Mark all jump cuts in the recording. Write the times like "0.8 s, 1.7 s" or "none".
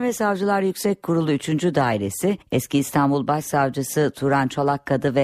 2.4 s